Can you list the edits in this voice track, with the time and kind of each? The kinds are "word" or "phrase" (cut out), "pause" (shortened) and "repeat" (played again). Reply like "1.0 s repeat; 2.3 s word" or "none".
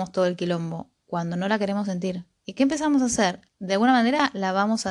3.5 s pause